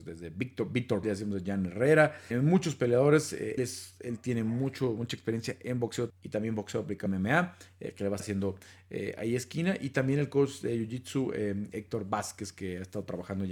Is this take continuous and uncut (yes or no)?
no